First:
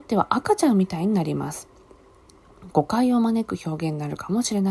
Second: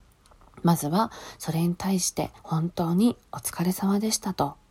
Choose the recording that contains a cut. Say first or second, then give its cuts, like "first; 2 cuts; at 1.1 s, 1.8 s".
second; 1 cut; at 2.4 s